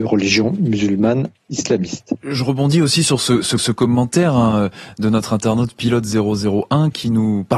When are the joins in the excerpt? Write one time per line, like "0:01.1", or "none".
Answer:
0:03.6